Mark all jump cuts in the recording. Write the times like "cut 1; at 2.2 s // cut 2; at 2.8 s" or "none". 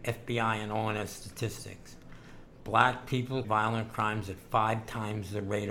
cut 1; at 3.4 s